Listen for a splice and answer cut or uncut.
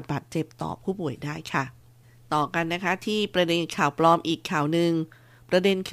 cut